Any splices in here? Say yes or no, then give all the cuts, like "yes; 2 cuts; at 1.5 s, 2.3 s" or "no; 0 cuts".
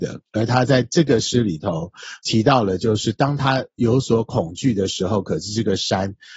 yes; 1 cut; at 2.2 s